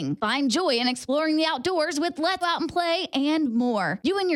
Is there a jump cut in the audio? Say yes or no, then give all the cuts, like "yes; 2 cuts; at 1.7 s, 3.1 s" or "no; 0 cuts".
yes; 1 cut; at 2.4 s